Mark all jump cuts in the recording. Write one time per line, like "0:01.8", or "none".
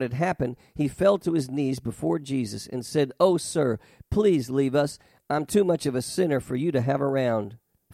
none